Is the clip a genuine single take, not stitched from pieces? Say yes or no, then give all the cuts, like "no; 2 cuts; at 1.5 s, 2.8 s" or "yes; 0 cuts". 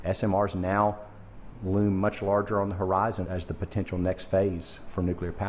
no; 1 cut; at 3.2 s